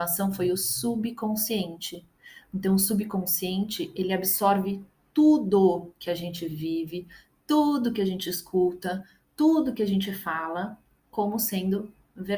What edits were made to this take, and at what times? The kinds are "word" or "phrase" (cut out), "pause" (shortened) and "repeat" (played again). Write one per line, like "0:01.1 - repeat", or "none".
none